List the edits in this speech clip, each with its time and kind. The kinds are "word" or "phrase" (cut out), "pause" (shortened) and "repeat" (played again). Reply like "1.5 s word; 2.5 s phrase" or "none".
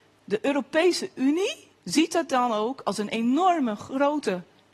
1.7 s pause